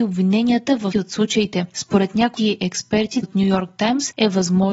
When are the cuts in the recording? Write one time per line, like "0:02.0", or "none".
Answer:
0:00.9
0:02.4
0:03.2

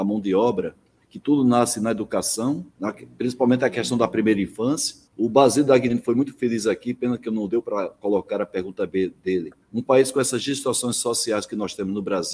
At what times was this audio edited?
0:02.7
0:05.1
0:09.6

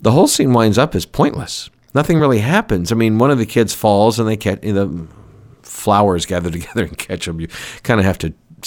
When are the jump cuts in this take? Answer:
none

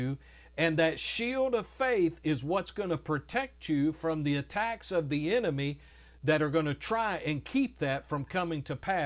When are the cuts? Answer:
none

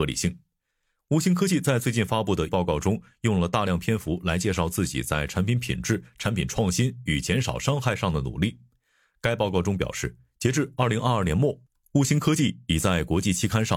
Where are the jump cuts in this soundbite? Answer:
0:02.5

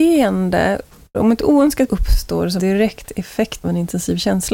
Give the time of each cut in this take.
0:01.1
0:01.9
0:02.6
0:03.6

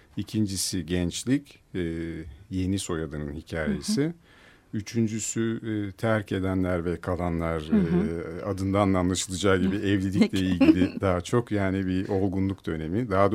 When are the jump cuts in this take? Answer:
none

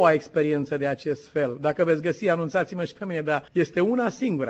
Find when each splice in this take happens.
0:03.5

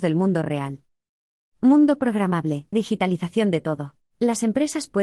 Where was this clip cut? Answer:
0:02.7
0:04.1

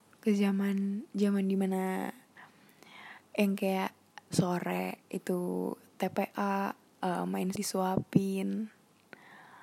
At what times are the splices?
0:01.1
0:04.3
0:06.9
0:07.5

